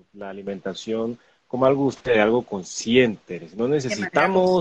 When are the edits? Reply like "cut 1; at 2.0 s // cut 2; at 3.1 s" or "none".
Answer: none